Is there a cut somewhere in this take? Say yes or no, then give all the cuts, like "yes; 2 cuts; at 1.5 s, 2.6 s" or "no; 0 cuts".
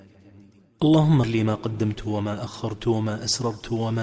yes; 1 cut; at 1.2 s